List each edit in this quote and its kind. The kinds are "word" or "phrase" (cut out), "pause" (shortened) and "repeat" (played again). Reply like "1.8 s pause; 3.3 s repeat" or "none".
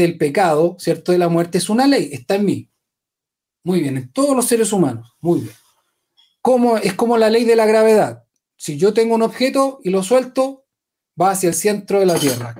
none